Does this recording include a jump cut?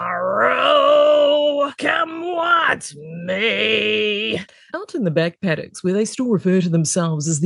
no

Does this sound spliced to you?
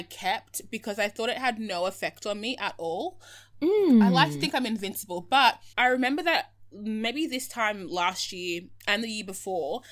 yes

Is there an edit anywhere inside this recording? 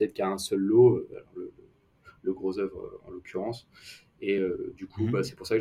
no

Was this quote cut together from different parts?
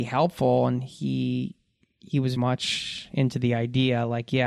yes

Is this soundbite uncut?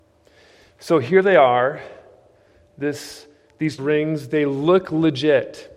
no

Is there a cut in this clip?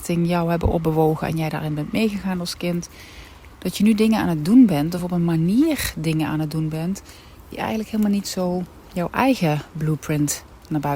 no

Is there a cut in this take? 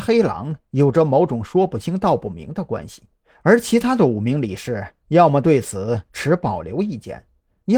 yes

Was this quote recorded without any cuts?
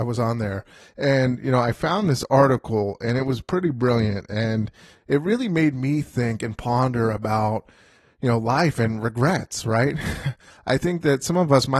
yes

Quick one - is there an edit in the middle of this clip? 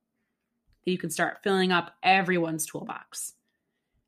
no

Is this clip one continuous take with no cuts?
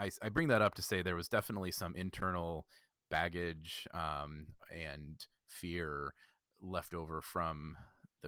yes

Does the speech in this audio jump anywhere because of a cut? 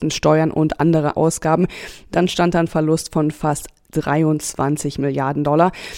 yes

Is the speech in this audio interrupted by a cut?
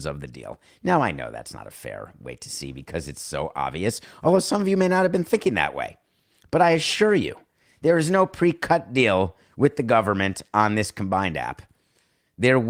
no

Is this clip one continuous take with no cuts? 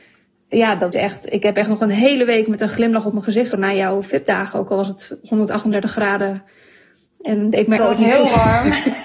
no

